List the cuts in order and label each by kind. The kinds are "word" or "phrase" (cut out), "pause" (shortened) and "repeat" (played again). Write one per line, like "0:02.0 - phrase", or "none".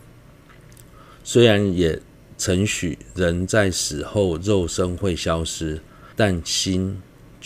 0:06.1 - pause